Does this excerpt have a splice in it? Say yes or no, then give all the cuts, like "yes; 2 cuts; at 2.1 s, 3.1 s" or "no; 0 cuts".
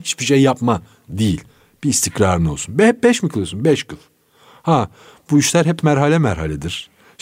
no; 0 cuts